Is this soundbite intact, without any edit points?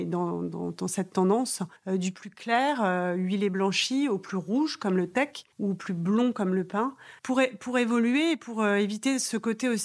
no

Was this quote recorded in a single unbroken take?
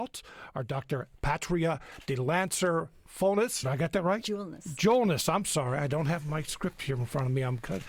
no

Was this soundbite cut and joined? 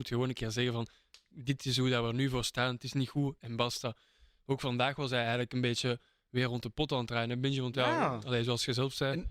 no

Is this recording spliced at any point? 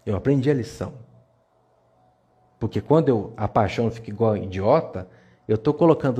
no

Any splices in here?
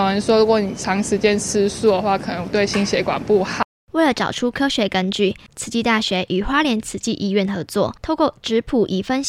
no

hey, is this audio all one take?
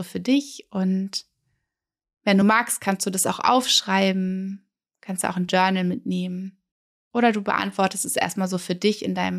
yes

